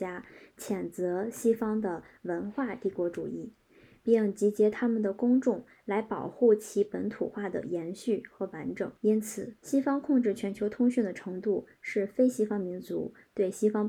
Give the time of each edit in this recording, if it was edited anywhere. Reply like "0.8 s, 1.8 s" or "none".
9.0 s, 9.6 s

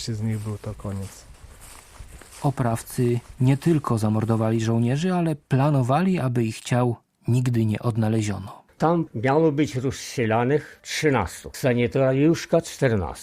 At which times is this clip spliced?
none

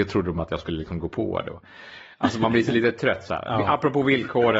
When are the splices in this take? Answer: none

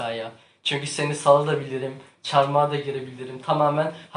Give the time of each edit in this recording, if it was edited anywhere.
none

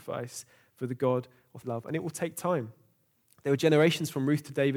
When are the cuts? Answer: 1.6 s

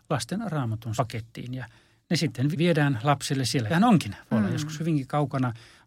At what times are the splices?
1.0 s, 2.5 s, 3.7 s

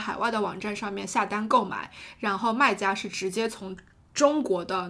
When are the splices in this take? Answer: none

